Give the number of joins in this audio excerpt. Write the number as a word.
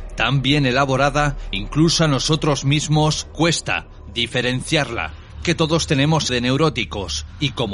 four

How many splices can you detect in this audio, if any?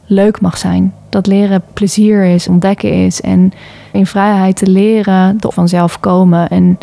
four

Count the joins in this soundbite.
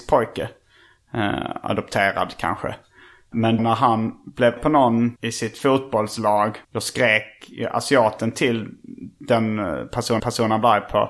five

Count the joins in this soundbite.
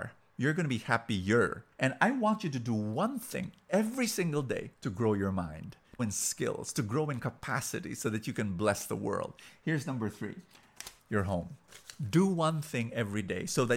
four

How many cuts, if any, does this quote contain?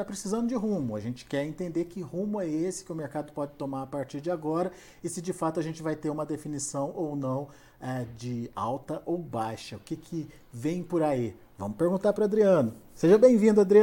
zero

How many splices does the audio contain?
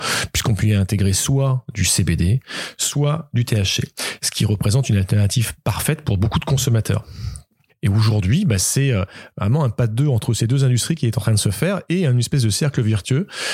zero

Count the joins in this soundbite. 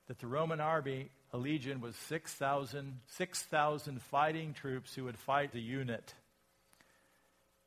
two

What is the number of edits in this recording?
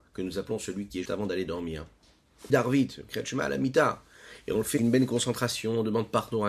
three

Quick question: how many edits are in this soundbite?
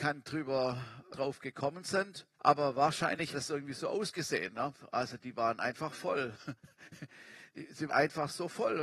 four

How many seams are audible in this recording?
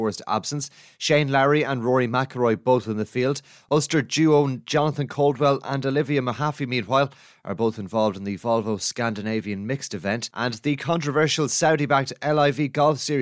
one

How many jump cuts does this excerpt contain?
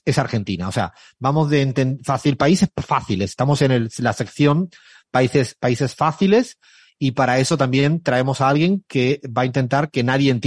zero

